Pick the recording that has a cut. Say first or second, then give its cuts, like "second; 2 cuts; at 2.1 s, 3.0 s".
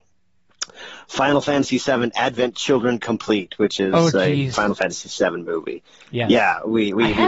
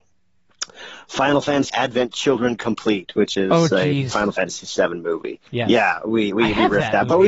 second; 2 cuts; at 1.7 s, 5.5 s